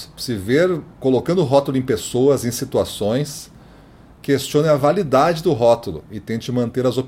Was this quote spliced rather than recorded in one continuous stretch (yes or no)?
yes